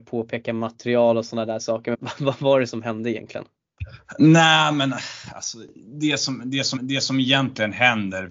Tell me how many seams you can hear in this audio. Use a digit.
2